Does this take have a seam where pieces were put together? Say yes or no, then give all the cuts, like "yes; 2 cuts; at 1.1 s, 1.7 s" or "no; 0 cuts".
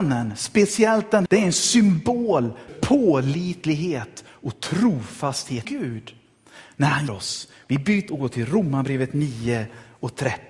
yes; 5 cuts; at 1.3 s, 2.7 s, 5.6 s, 7.1 s, 8.1 s